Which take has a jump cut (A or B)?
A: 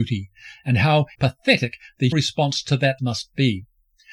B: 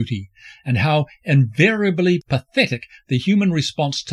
A